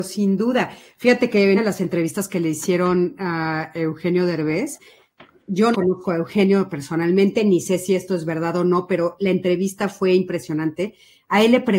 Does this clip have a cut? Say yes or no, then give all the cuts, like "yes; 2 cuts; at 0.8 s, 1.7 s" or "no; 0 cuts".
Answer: yes; 2 cuts; at 1.6 s, 5.7 s